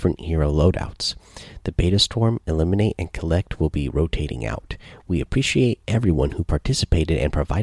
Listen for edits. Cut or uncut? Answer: uncut